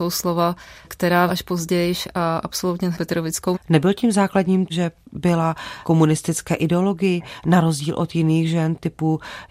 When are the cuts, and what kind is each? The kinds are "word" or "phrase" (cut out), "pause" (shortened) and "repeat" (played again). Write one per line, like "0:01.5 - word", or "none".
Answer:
0:01.3 - word
0:02.9 - word
0:03.5 - word
0:04.7 - word
0:05.8 - word